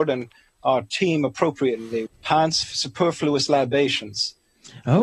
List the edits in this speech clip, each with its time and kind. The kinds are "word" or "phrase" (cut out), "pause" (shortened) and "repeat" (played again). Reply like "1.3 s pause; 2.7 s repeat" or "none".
2.1 s word; 2.6 s word